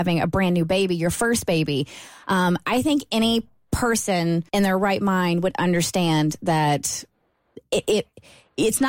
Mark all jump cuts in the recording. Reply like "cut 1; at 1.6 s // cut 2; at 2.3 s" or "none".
cut 1; at 4.5 s